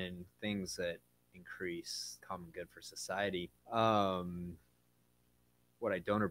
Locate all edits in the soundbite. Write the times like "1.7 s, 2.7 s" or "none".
2.2 s, 3.6 s